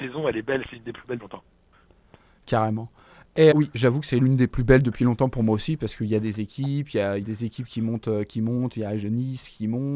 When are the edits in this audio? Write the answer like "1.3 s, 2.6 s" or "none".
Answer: 1.2 s, 3.5 s, 7.2 s